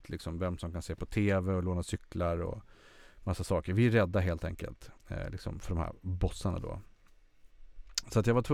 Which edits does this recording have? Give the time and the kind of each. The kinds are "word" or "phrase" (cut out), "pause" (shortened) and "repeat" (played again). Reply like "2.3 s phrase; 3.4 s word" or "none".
5.0 s pause